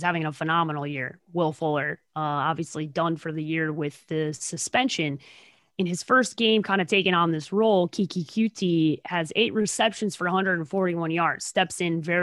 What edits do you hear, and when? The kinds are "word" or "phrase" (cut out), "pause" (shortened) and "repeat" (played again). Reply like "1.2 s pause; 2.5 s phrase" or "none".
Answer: none